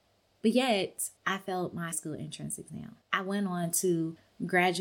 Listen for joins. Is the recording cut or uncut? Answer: cut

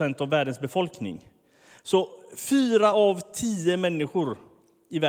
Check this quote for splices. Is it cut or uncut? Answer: uncut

